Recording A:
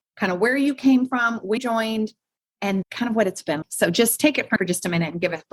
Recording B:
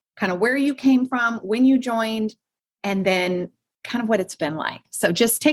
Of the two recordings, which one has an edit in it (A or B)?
A